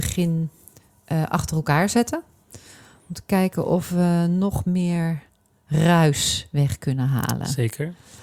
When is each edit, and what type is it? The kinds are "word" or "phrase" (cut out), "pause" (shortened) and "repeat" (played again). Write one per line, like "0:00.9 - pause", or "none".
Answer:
none